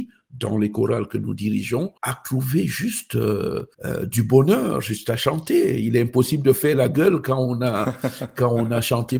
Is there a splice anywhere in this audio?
yes; 2 cuts; at 2.0 s, 3.7 s

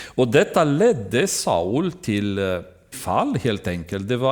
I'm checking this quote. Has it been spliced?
yes; 1 cut; at 2.9 s

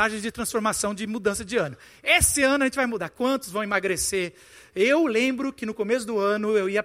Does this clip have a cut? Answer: no; 0 cuts

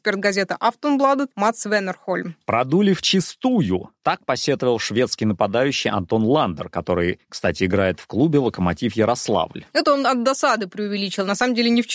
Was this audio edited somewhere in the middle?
yes; 1 cut; at 9.7 s

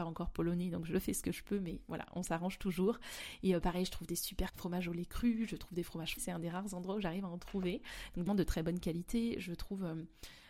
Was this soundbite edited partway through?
yes; 3 cuts; at 4.5 s, 6.2 s, 8.3 s

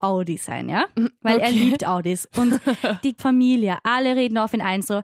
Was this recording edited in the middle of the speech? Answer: yes; 1 cut; at 3.2 s

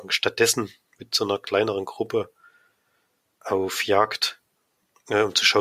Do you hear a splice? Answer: no; 0 cuts

